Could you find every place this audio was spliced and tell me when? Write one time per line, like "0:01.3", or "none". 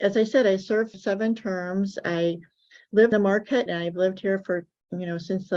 0:00.9
0:03.1
0:03.7